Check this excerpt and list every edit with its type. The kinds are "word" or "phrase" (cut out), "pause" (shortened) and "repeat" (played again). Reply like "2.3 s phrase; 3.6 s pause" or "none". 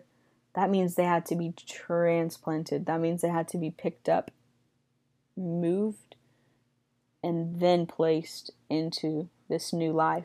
none